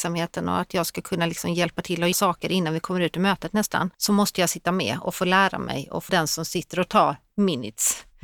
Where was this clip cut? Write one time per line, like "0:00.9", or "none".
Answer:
0:02.1
0:03.9
0:06.1